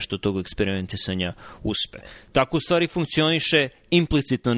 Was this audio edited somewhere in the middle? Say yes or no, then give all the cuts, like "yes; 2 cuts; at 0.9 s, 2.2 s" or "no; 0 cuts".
no; 0 cuts